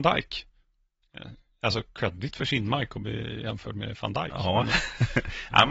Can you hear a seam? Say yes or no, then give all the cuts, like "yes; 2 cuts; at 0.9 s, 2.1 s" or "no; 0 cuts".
no; 0 cuts